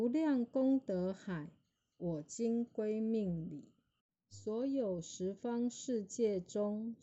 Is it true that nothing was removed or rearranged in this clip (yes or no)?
yes